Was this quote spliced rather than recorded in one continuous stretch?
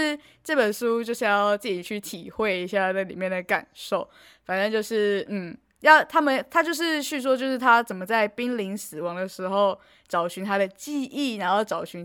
no; 0 cuts

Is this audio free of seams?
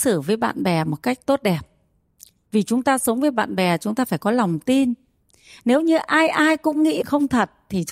no; 1 cut; at 7.0 s

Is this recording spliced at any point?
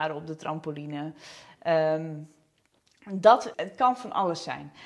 yes; 1 cut; at 3.5 s

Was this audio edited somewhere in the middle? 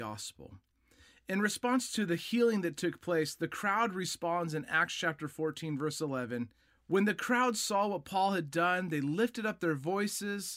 yes; 1 cut; at 6.6 s

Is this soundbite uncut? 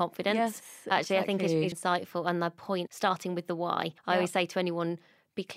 no; 3 cuts; at 1.7 s, 2.9 s, 4.0 s

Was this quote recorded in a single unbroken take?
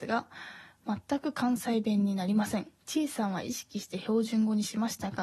no; 1 cut; at 2.8 s

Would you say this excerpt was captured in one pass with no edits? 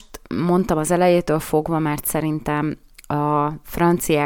yes; 0 cuts

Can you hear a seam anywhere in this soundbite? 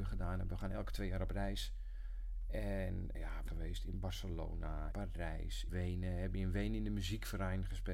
yes; 4 cuts; at 3.1 s, 3.5 s, 4.9 s, 5.7 s

